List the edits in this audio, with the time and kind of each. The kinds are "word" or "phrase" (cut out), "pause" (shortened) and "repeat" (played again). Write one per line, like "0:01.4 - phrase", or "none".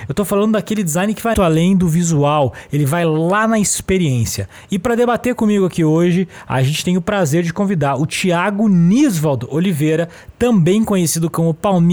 0:01.3 - word